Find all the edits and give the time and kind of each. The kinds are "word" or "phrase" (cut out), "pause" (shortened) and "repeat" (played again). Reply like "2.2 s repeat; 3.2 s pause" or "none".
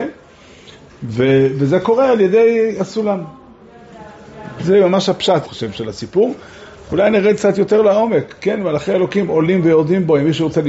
5.4 s word